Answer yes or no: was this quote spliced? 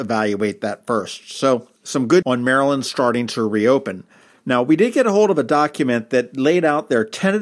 yes